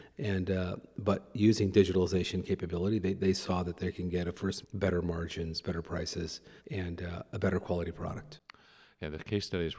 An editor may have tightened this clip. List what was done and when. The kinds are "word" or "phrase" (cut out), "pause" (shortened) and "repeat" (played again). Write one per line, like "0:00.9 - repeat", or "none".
0:04.6 - phrase
0:06.6 - pause